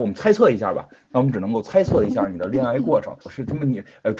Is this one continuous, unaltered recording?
no; 1 cut; at 3.2 s

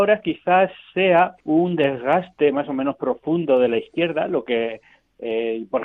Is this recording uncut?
no; 1 cut; at 1.4 s

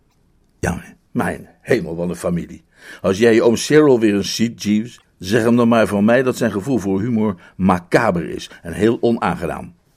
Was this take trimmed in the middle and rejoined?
yes; 1 cut; at 1.1 s

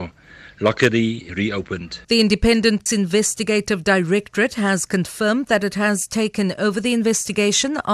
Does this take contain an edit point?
yes; 3 cuts; at 1.3 s, 2.0 s, 2.9 s

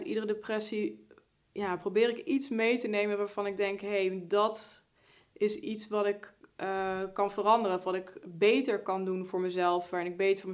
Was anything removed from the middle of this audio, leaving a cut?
no; 0 cuts

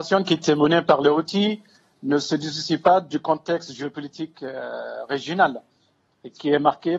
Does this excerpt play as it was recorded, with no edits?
yes; 0 cuts

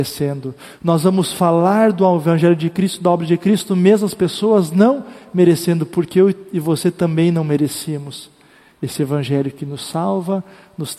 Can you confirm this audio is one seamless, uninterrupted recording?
yes; 0 cuts

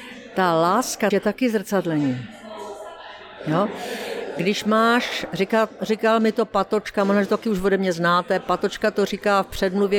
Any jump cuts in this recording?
yes; 1 cut; at 1.1 s

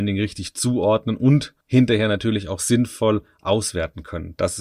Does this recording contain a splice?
yes; 1 cut; at 1.6 s

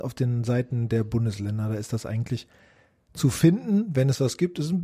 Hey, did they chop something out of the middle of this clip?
no; 0 cuts

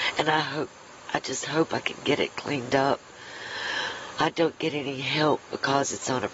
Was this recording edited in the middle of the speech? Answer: no; 0 cuts

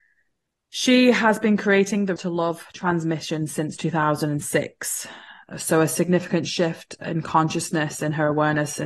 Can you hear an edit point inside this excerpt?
yes; 1 cut; at 2.2 s

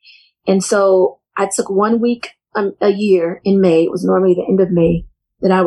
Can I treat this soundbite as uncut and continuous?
yes; 0 cuts

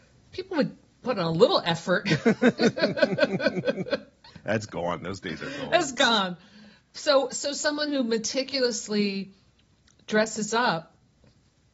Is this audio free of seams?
yes; 0 cuts

